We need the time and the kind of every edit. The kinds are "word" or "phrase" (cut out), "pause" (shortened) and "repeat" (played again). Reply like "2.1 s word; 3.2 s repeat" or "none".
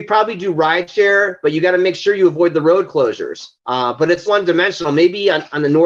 3.6 s pause; 4.3 s word